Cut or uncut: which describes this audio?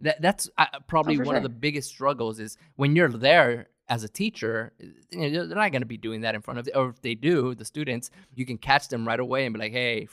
cut